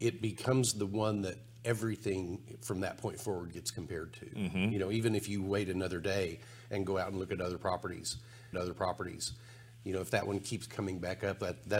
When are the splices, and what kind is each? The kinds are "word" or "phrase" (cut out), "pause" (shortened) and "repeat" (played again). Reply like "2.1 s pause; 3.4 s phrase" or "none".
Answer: 8.5 s repeat